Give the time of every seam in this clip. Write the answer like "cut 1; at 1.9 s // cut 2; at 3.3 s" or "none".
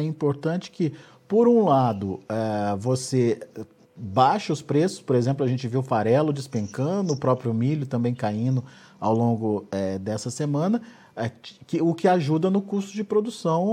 none

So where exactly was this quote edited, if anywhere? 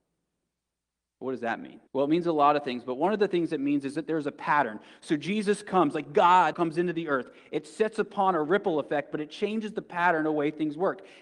cut 1; at 1.9 s // cut 2; at 6.5 s

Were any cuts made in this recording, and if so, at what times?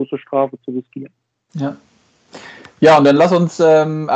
none

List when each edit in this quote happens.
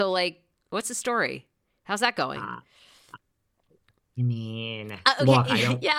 none

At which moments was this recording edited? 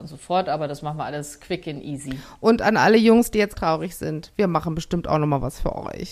cut 1; at 3.5 s

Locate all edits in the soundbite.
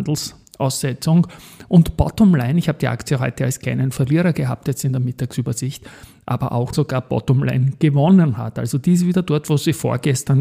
cut 1; at 6.7 s

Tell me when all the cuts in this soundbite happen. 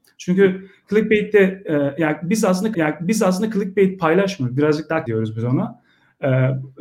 cut 1; at 2.7 s // cut 2; at 5.1 s

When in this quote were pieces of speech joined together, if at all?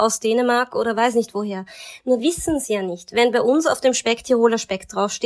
cut 1; at 2.2 s

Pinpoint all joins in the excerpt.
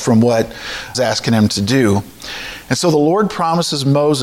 cut 1; at 0.9 s

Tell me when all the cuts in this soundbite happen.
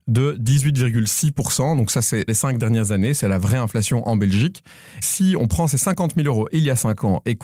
cut 1; at 2.3 s

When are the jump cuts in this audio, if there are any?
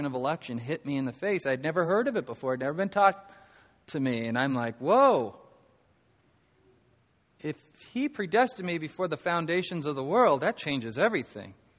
none

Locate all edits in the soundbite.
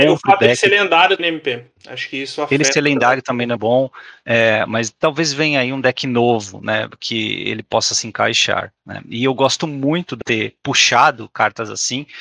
cut 1; at 1.2 s // cut 2; at 3.6 s // cut 3; at 10.2 s

